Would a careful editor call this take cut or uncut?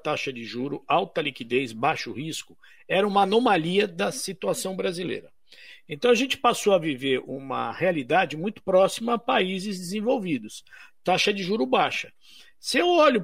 uncut